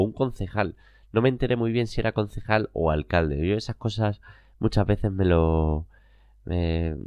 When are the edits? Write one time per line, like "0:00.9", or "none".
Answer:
none